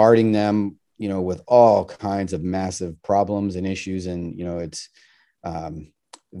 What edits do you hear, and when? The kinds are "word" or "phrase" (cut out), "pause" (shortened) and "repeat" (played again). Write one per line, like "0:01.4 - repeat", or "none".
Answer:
none